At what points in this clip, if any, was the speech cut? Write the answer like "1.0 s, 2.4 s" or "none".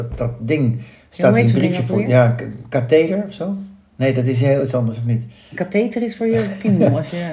none